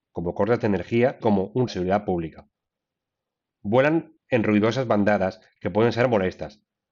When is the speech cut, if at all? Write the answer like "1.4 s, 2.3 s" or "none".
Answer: 1.2 s, 1.7 s, 4.2 s